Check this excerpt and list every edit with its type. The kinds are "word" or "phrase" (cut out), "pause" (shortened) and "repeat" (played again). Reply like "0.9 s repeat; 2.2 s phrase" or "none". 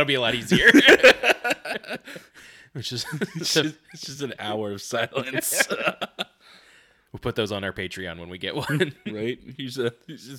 none